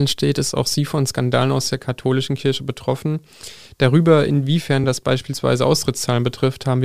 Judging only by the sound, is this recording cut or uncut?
uncut